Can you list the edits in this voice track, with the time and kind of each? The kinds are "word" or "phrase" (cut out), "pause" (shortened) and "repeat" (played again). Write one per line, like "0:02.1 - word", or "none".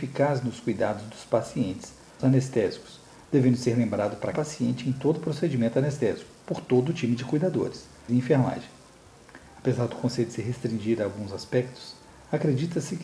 0:02.2 - phrase
0:04.3 - word
0:06.4 - pause
0:08.1 - phrase